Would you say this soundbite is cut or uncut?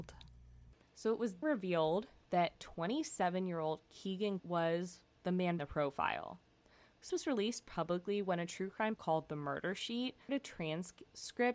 cut